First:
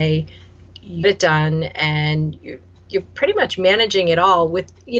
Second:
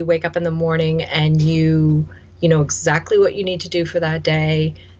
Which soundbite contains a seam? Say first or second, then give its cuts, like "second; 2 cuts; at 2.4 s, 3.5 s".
first; 2 cuts; at 1.0 s, 2.4 s